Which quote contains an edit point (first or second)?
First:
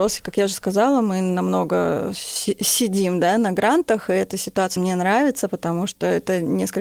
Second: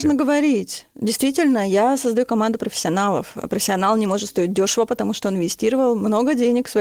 first